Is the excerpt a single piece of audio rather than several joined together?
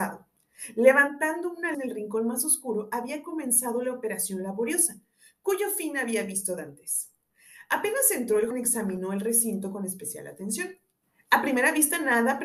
no; 2 cuts; at 1.7 s, 8.5 s

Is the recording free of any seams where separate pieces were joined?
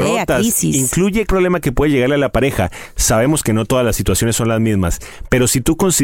no; 1 cut; at 1.3 s

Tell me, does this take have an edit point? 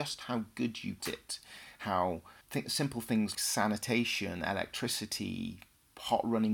yes; 3 cuts; at 1.0 s, 2.4 s, 3.3 s

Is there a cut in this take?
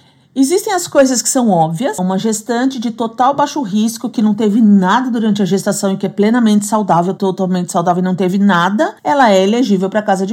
yes; 2 cuts; at 2.0 s, 9.0 s

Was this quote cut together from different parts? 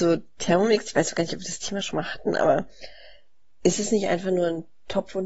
no; 0 cuts

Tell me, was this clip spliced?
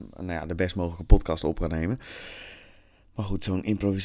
no; 0 cuts

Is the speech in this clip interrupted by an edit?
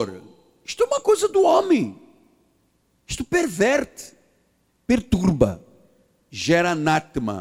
no; 0 cuts

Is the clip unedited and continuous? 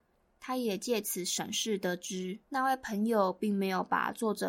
no; 1 cut; at 2.4 s

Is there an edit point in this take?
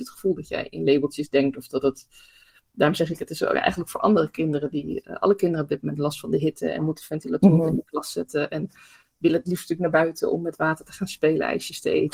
no; 0 cuts

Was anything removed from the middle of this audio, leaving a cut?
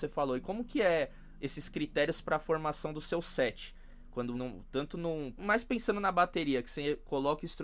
yes; 2 cuts; at 4.3 s, 5.4 s

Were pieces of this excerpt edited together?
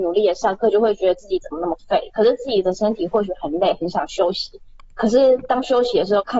no; 0 cuts

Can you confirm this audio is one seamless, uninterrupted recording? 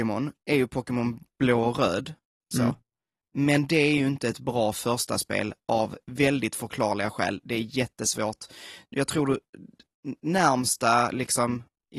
yes; 0 cuts

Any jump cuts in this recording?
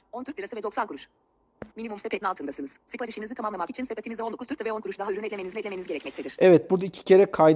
yes; 5 cuts; at 1.7 s, 2.2 s, 4.6 s, 5.0 s, 5.5 s

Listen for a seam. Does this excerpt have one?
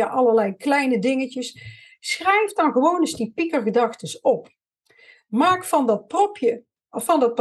no; 0 cuts

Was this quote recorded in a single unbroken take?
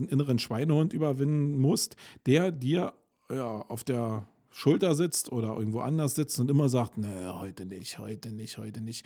yes; 0 cuts

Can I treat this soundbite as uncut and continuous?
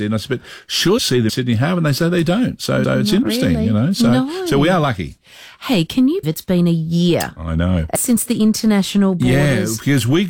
no; 5 cuts; at 1.0 s, 1.3 s, 2.8 s, 6.2 s, 8.0 s

